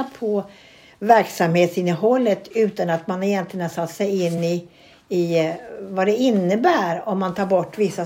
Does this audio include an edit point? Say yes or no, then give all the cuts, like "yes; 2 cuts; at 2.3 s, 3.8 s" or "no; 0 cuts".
no; 0 cuts